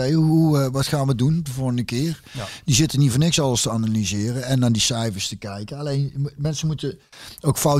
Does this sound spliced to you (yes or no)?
no